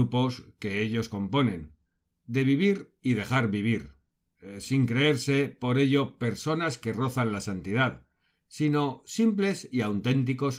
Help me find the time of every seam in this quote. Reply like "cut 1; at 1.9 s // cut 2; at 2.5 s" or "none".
none